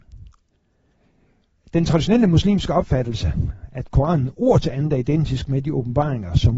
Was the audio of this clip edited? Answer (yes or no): no